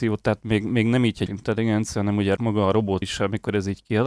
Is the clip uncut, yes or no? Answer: no